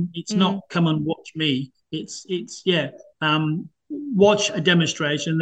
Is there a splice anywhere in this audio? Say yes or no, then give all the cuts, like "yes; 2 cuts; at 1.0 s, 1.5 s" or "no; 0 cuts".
no; 0 cuts